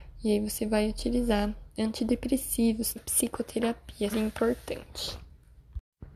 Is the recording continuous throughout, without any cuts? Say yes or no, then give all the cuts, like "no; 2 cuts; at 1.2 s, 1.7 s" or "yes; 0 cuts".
no; 2 cuts; at 3.0 s, 4.1 s